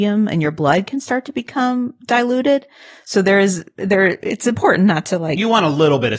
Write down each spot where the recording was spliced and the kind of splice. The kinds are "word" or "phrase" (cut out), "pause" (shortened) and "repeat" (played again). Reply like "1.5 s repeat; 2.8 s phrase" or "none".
none